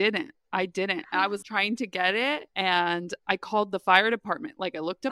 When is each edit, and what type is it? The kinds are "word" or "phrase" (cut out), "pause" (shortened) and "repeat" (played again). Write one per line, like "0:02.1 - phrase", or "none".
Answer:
0:01.4 - word